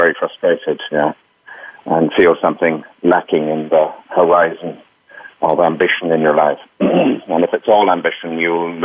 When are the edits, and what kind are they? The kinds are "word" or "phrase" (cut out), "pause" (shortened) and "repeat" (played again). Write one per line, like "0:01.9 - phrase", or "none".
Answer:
0:05.3 - pause